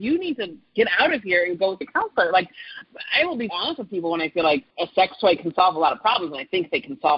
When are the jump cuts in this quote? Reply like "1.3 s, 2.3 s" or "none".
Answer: 1.8 s, 3.5 s, 4.7 s